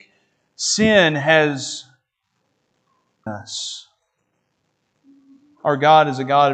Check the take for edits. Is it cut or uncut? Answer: cut